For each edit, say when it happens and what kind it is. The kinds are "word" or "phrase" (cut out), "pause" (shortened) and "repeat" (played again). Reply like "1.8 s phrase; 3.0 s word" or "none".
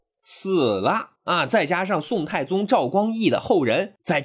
1.2 s pause